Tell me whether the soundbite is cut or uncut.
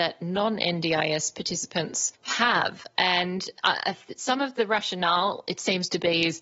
cut